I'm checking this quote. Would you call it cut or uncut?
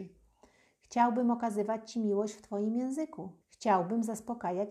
cut